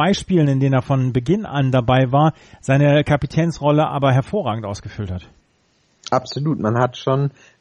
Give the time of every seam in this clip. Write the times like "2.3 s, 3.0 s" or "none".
none